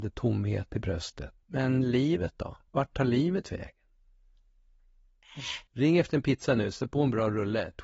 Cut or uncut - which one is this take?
cut